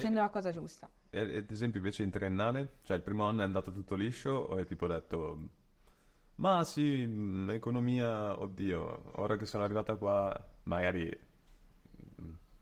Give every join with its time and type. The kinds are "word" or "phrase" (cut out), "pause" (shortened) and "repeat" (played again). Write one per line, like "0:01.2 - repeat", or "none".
none